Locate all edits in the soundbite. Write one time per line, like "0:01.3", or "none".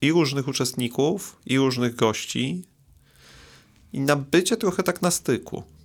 none